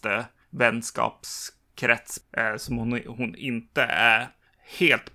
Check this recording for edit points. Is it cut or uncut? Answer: uncut